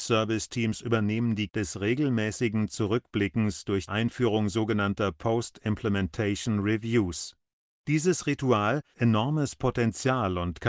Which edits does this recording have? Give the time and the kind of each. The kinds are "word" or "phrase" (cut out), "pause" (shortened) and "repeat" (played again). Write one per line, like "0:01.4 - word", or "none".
0:01.5 - word
0:03.9 - word
0:08.9 - word